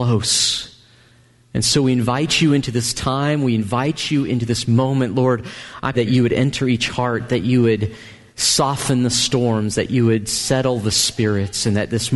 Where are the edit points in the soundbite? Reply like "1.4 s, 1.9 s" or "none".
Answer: 5.9 s